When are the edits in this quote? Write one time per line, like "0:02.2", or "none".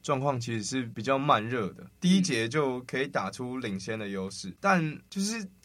0:01.9